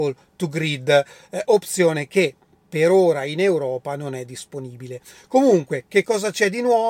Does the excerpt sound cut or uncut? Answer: uncut